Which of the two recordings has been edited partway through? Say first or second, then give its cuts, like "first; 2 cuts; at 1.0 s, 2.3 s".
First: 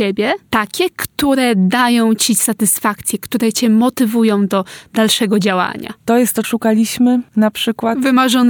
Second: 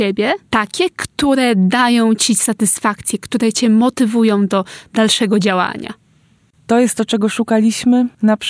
first; 2 cuts; at 6.0 s, 6.4 s